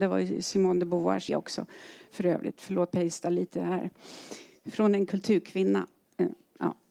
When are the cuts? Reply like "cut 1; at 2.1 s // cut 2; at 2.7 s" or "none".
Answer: cut 1; at 1.3 s // cut 2; at 2.9 s